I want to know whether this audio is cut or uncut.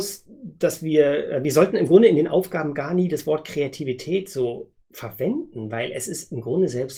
cut